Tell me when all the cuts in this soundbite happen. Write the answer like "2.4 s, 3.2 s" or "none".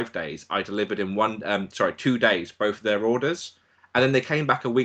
none